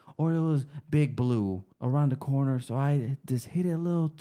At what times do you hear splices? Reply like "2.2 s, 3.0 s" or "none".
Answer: 1.7 s